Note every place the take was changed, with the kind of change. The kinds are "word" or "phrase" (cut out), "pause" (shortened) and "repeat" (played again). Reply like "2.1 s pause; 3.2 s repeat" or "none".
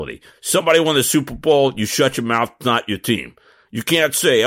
none